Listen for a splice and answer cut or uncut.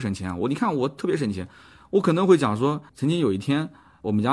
cut